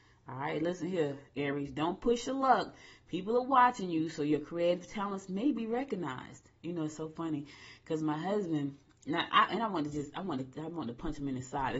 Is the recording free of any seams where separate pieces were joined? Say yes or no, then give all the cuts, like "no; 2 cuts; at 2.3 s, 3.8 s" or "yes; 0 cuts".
yes; 0 cuts